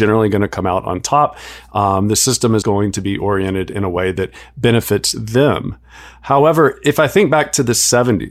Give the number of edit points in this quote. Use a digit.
1